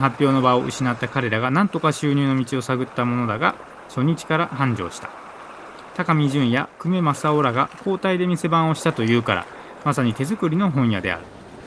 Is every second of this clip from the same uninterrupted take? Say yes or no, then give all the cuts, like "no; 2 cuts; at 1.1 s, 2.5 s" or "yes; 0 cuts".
yes; 0 cuts